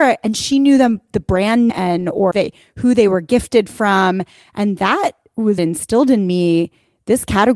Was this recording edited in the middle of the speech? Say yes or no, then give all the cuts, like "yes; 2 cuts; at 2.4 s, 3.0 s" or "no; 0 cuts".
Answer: yes; 3 cuts; at 1.7 s, 2.3 s, 5.6 s